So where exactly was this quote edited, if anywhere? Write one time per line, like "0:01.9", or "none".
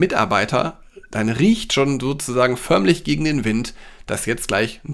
none